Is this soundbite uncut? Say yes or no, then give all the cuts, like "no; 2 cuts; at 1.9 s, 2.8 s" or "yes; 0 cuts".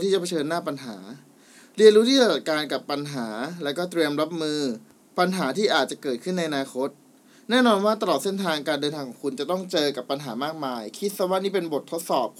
yes; 0 cuts